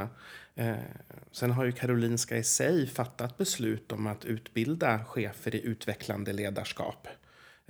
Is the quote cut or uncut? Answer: uncut